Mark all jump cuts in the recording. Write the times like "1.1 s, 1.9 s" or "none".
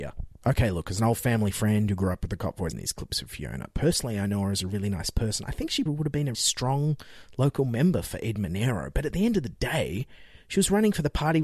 2.7 s, 5.9 s, 6.3 s